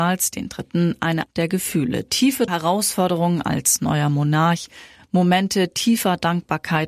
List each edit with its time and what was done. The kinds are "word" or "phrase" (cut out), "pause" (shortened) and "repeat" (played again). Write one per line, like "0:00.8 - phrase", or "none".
0:01.3 - word
0:02.5 - word